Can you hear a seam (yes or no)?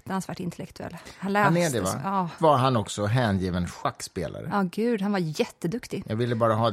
yes